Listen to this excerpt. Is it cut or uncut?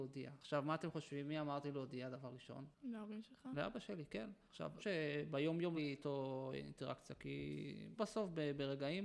cut